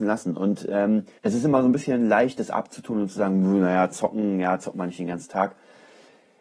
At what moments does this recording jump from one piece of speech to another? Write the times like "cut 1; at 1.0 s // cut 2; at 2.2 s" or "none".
cut 1; at 1.2 s